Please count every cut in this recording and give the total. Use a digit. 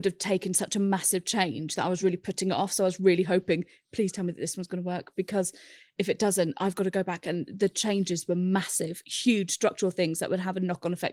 0